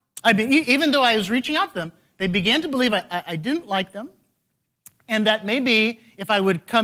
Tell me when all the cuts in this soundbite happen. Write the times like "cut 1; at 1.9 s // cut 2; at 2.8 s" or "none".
none